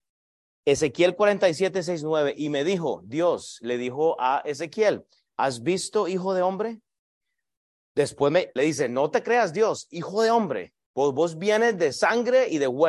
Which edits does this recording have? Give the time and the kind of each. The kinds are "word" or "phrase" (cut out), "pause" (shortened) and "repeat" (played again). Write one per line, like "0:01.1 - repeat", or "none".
0:08.6 - phrase